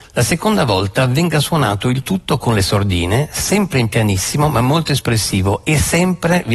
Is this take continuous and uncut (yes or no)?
yes